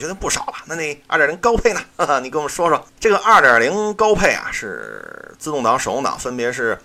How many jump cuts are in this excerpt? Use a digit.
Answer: 1